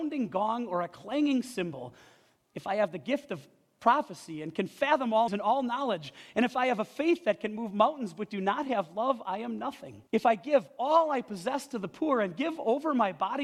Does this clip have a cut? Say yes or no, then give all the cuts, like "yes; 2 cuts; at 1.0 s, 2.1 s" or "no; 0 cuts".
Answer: yes; 2 cuts; at 5.3 s, 10.1 s